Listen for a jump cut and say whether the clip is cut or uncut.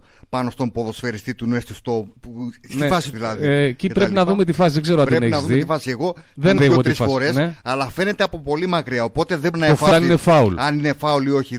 cut